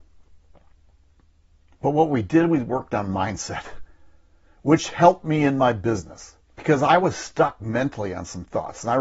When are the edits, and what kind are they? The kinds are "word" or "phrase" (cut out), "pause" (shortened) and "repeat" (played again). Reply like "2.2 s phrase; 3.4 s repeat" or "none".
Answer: 6.5 s pause